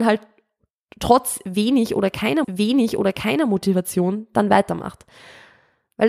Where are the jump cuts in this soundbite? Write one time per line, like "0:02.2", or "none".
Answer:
0:02.4